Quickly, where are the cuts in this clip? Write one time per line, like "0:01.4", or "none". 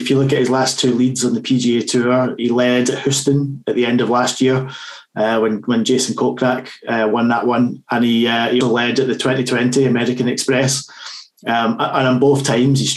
0:08.6